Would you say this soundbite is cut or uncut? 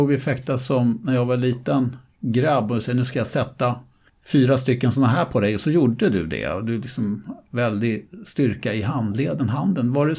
cut